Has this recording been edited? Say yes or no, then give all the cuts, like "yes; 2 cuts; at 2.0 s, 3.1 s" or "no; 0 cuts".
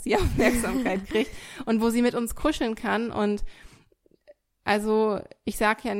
no; 0 cuts